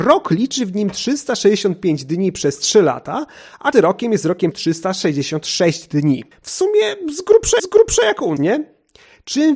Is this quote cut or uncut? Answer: cut